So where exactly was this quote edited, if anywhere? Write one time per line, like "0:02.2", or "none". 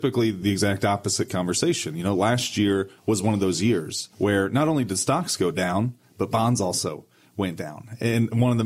0:03.0
0:04.1